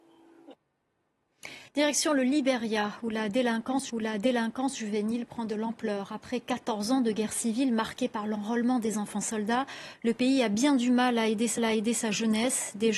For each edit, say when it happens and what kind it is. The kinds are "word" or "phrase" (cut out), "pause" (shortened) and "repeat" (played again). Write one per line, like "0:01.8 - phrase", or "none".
0:01.7 - pause
0:03.9 - repeat
0:11.6 - repeat